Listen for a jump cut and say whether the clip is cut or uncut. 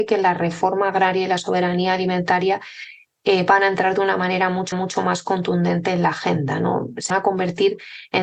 cut